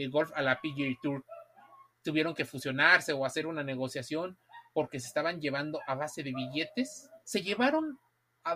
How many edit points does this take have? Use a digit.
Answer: 2